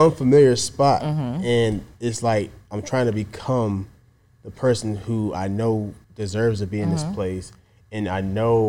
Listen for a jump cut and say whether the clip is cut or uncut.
cut